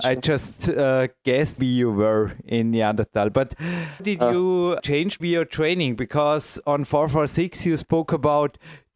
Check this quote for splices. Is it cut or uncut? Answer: cut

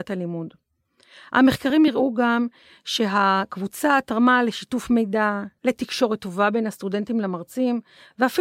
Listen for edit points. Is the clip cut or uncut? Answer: uncut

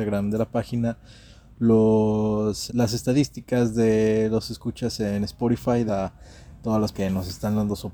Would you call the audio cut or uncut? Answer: cut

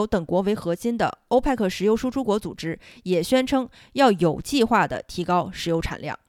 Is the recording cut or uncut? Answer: uncut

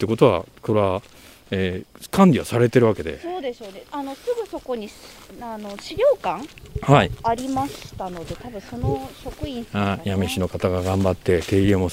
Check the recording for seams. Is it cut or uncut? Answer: uncut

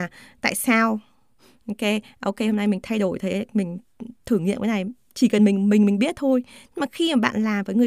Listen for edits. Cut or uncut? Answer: uncut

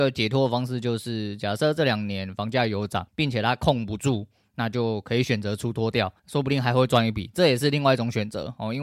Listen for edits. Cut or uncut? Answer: cut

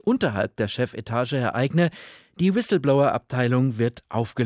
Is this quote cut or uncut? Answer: uncut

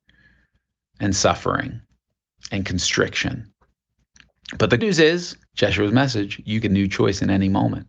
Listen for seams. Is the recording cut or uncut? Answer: cut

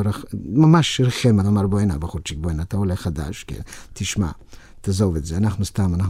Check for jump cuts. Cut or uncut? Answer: cut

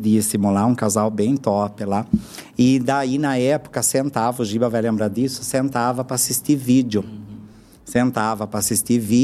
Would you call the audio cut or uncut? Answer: uncut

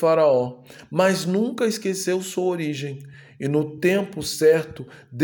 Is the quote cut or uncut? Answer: uncut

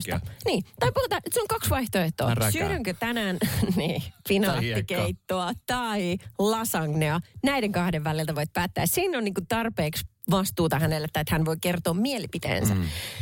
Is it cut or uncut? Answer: uncut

